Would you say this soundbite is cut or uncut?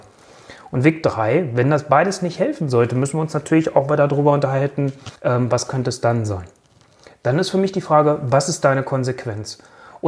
cut